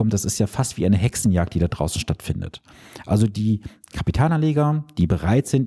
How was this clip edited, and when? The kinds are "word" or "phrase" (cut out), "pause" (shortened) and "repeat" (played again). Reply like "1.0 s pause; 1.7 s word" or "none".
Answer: none